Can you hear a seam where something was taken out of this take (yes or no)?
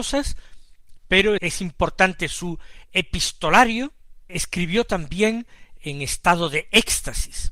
yes